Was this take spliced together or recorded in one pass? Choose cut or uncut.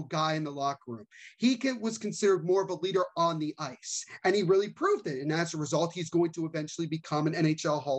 uncut